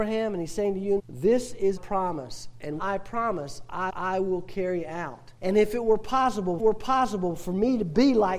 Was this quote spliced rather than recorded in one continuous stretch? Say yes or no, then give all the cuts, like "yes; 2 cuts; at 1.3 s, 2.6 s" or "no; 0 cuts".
yes; 6 cuts; at 1.0 s, 1.8 s, 2.8 s, 3.9 s, 5.4 s, 6.6 s